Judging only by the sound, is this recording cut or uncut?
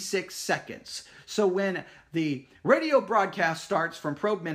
uncut